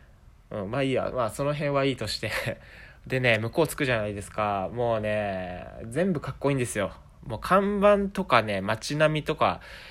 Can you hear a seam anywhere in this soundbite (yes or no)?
no